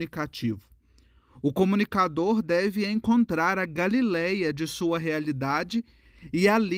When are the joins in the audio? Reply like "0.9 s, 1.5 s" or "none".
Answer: none